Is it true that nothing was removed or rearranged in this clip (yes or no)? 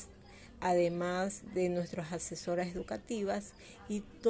yes